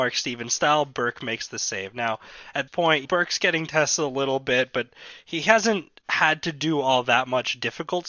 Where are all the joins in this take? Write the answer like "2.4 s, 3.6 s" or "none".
2.7 s, 3.0 s